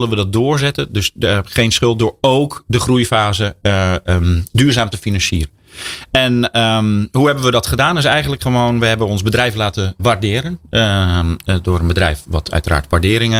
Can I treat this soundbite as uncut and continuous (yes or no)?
no